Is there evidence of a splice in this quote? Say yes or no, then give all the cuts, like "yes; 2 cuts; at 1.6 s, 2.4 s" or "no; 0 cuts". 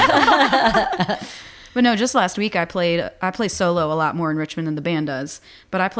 no; 0 cuts